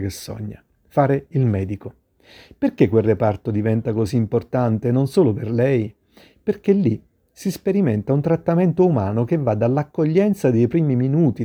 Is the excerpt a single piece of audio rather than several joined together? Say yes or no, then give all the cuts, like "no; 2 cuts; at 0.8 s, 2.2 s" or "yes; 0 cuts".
yes; 0 cuts